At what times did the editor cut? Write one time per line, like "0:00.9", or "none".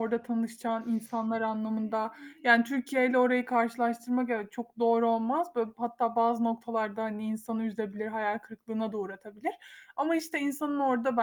none